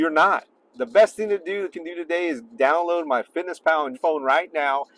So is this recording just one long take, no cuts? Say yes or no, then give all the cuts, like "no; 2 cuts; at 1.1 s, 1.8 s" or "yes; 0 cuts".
no; 2 cuts; at 1.7 s, 3.9 s